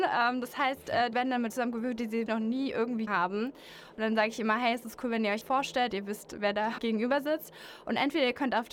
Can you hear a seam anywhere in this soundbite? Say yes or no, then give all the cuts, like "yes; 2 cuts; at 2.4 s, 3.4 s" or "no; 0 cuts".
yes; 7 cuts; at 1.1 s, 1.5 s, 2.3 s, 3.1 s, 5.4 s, 5.9 s, 6.8 s